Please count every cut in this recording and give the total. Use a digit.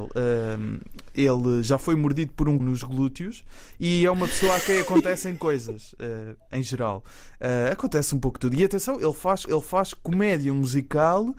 2